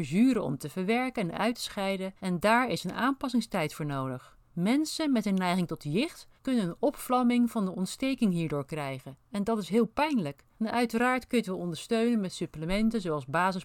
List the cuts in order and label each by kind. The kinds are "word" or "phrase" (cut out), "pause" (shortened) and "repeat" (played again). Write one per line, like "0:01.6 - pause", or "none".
0:02.2 - pause
0:04.4 - pause
0:06.4 - pause
0:10.5 - pause